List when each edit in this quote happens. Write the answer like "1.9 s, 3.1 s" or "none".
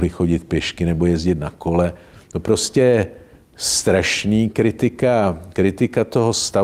none